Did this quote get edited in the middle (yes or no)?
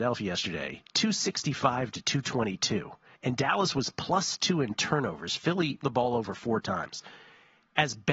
yes